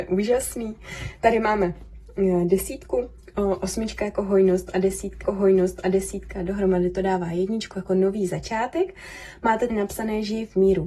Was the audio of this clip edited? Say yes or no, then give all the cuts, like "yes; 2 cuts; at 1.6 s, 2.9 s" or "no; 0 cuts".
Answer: yes; 2 cuts; at 5.2 s, 9.7 s